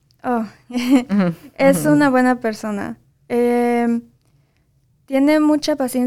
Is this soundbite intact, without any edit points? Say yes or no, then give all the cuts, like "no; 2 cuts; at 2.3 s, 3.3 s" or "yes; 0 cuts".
yes; 0 cuts